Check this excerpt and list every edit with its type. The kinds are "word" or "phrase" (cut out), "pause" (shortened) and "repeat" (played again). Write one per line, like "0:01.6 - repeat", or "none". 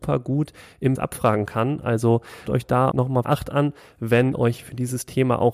0:01.0 - word
0:02.5 - word
0:02.9 - word
0:03.2 - word
0:04.3 - word